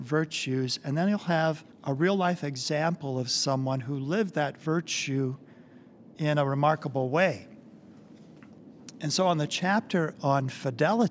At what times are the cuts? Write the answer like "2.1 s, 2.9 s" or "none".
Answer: 1.7 s, 6.1 s